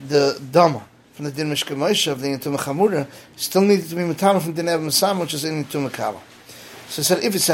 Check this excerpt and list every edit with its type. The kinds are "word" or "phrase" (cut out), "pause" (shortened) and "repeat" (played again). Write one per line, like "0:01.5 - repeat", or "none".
none